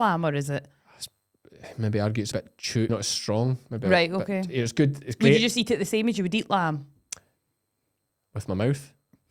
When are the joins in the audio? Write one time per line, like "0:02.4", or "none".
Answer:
0:02.3
0:02.9